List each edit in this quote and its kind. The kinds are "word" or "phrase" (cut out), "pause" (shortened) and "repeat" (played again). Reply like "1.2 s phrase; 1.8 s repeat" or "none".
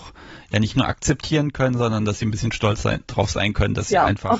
none